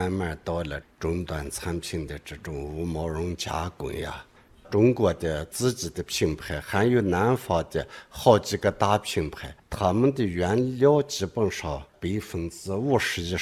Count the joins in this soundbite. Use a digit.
0